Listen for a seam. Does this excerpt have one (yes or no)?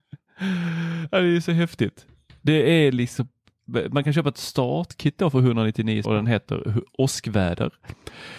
yes